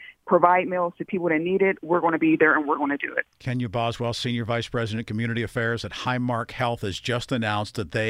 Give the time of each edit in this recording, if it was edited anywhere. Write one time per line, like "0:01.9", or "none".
none